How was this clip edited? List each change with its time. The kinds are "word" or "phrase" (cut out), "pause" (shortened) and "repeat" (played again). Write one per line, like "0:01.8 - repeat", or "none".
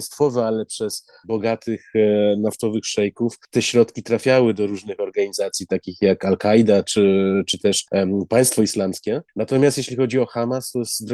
0:01.2 - word